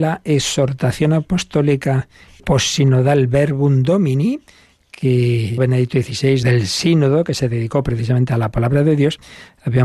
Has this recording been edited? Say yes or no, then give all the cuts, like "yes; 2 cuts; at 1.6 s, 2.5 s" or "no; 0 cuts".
yes; 3 cuts; at 2.4 s, 5.6 s, 6.4 s